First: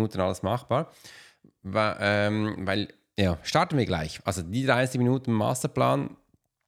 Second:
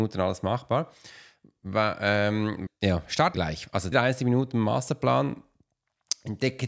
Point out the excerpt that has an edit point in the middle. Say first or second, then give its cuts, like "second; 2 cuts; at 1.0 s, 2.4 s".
second; 3 cuts; at 2.7 s, 3.3 s, 3.9 s